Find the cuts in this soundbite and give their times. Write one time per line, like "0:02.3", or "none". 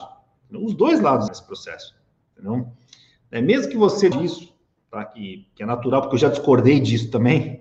0:01.3
0:04.1